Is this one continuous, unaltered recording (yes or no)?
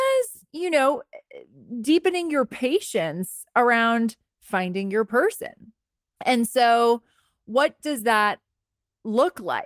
yes